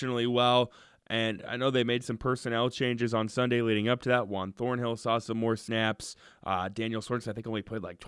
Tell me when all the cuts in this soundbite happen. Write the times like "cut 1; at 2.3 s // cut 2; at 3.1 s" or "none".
none